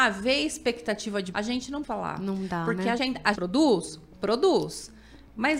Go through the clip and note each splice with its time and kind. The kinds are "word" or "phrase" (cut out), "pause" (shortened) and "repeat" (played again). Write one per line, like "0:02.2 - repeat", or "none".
0:01.3 - word
0:01.8 - word
0:03.0 - word
0:03.3 - word